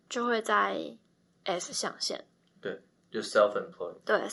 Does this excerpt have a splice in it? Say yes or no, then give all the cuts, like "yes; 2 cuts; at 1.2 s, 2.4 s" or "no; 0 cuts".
no; 0 cuts